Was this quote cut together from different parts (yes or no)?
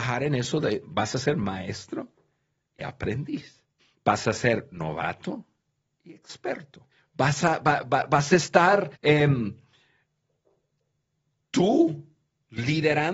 yes